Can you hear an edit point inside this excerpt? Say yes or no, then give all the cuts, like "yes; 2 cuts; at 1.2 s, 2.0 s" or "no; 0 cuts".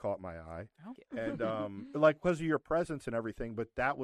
yes; 1 cut; at 1.0 s